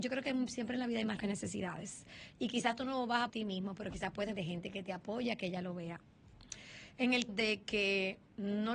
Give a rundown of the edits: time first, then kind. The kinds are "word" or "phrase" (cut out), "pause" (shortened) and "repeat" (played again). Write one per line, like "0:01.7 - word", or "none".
0:01.2 - word
0:03.3 - phrase
0:04.4 - phrase
0:07.3 - word

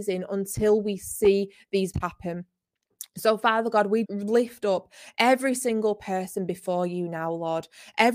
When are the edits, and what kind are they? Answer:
0:01.9 - word
0:04.1 - word

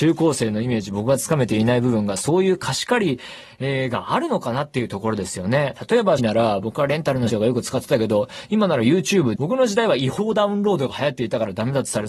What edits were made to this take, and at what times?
0:06.2 - word
0:07.3 - word
0:09.4 - word

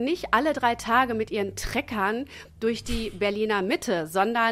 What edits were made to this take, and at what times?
none

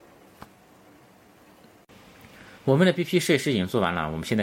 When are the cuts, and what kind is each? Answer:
0:02.6 - pause

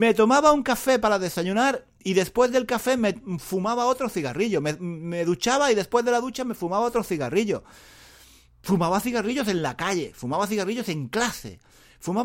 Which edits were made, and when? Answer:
none

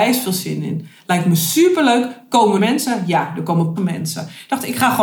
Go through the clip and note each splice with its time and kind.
0:02.6 - phrase
0:03.8 - word

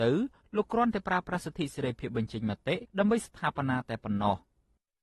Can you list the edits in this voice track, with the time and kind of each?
0:02.9 - pause

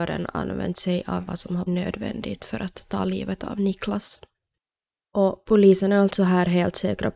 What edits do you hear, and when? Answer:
0:01.3 - phrase
0:01.7 - word

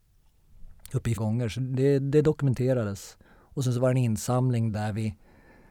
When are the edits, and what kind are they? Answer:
0:01.2 - phrase
0:03.2 - pause

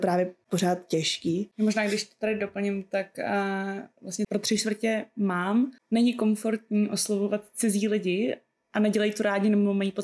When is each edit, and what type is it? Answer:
none

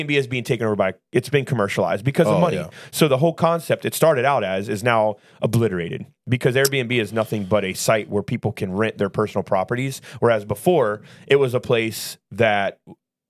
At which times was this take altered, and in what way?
none

